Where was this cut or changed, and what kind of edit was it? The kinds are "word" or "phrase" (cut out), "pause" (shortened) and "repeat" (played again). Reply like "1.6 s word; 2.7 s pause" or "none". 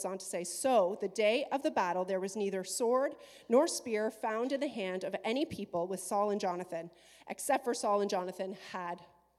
none